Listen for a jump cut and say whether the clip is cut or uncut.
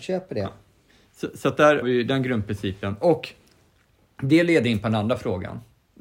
cut